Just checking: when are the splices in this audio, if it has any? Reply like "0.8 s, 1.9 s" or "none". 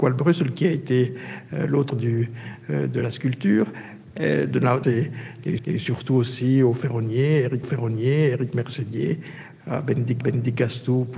1.9 s, 4.8 s, 5.6 s, 7.6 s, 10.2 s